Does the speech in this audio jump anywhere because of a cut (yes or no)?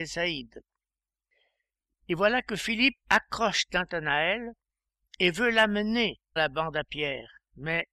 yes